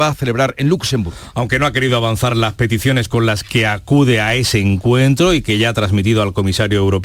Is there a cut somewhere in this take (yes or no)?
no